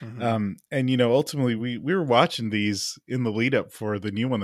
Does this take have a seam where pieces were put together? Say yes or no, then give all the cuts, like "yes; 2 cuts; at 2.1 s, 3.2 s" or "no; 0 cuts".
no; 0 cuts